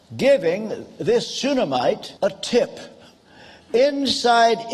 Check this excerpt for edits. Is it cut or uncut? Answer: cut